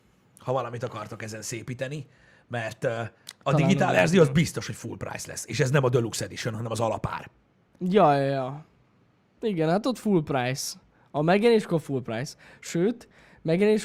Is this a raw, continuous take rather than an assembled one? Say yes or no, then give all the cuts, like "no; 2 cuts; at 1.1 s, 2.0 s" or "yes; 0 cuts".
yes; 0 cuts